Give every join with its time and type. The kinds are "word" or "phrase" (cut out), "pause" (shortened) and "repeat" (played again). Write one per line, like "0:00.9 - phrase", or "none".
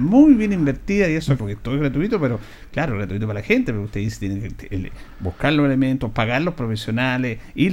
0:01.4 - word

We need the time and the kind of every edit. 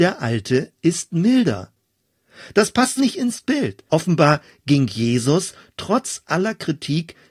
0:03.0 - phrase
0:03.9 - pause

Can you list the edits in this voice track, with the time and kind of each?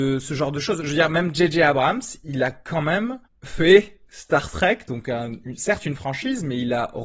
0:03.3 - pause

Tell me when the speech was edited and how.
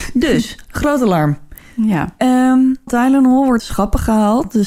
0:02.9 - word
0:03.6 - word

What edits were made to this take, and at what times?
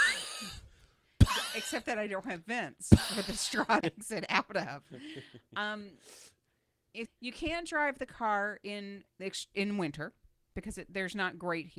0:03.8 - word
0:07.1 - word

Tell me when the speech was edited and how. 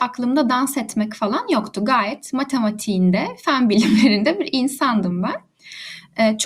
none

